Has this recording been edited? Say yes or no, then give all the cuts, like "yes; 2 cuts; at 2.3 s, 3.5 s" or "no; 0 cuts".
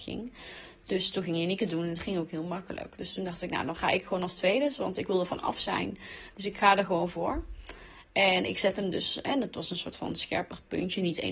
no; 0 cuts